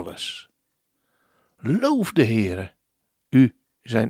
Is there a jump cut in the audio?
no; 0 cuts

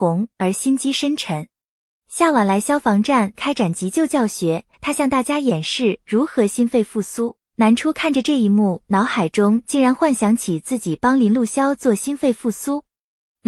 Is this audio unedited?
no; 1 cut; at 4.7 s

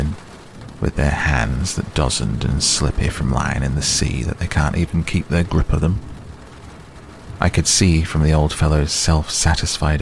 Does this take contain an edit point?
no; 0 cuts

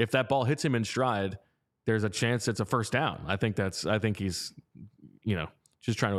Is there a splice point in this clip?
no; 0 cuts

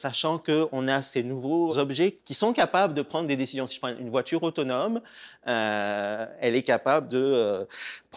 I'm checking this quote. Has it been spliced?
yes; 1 cut; at 1.7 s

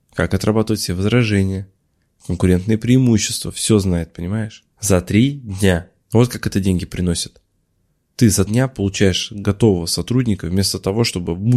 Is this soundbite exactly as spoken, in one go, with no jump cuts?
no; 3 cuts; at 4.7 s, 6.0 s, 8.5 s

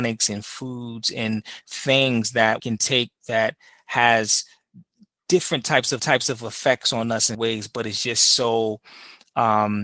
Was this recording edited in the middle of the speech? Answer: yes; 3 cuts; at 2.6 s, 6.0 s, 7.3 s

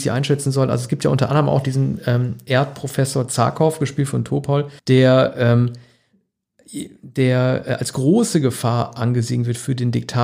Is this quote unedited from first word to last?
no; 1 cut; at 4.8 s

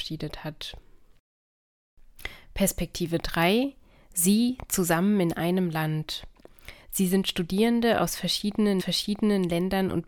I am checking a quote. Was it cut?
yes; 1 cut; at 8.8 s

